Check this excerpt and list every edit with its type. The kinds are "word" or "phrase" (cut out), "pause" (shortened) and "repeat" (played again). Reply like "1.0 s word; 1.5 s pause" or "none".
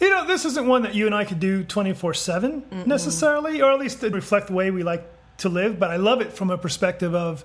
4.1 s word

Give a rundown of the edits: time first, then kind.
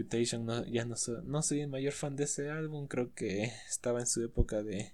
none

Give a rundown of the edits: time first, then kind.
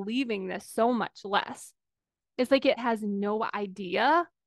2.8 s word

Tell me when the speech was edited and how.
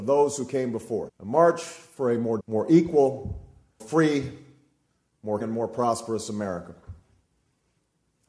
1.1 s word; 2.4 s word; 3.8 s word; 5.4 s word

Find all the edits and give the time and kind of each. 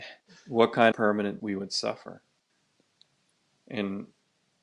0.9 s word; 1.4 s phrase

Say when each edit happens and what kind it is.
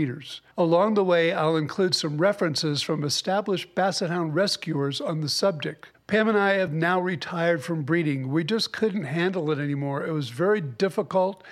none

